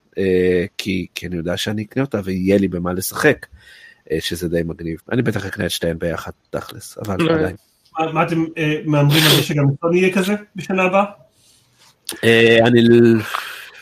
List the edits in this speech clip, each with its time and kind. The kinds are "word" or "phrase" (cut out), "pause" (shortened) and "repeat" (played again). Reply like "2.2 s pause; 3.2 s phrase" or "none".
5.0 s pause